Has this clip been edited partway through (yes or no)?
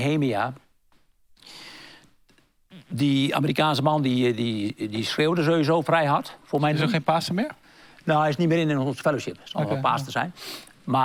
no